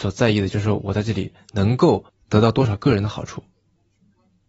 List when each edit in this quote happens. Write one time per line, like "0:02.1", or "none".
0:02.1